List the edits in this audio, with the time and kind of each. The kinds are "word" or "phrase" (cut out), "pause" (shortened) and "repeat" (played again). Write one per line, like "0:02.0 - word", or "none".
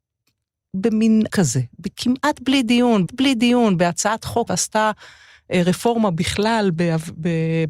0:01.3 - word
0:03.1 - repeat
0:04.5 - word